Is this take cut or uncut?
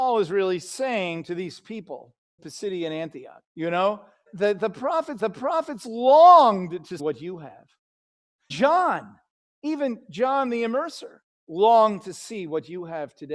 cut